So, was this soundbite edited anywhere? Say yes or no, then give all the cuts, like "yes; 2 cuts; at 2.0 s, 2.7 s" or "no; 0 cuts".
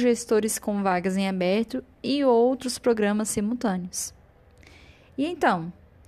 no; 0 cuts